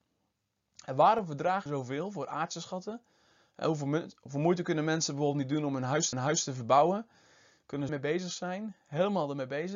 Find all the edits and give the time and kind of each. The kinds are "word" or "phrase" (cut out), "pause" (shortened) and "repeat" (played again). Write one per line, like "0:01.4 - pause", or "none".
0:01.7 - word
0:06.1 - repeat
0:07.9 - phrase